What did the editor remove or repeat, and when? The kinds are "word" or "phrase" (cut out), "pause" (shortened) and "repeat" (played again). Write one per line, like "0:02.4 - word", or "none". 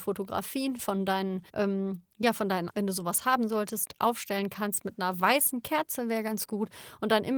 0:01.5 - pause
0:02.7 - word